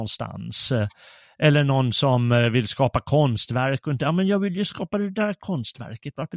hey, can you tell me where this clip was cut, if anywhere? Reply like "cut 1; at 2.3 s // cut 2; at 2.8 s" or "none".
none